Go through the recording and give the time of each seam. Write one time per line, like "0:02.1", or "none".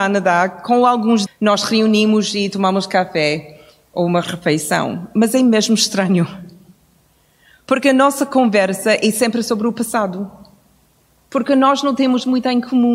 0:01.3